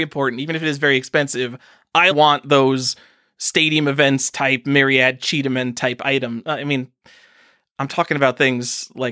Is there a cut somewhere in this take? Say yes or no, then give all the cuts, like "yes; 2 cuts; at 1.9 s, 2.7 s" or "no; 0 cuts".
yes; 1 cut; at 2.1 s